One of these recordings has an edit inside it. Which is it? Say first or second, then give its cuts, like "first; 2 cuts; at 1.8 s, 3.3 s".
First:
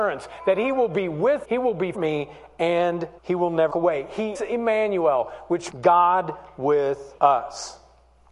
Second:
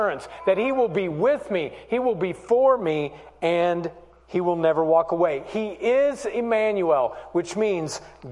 first; 7 cuts; at 1.4 s, 1.9 s, 3.2 s, 3.7 s, 4.3 s, 5.7 s, 7.2 s